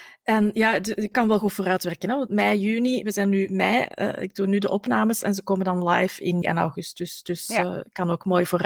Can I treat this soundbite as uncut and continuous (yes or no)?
no